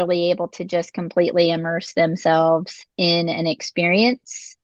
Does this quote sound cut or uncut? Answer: uncut